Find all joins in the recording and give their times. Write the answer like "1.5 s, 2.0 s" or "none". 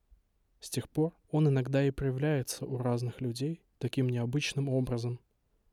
1.2 s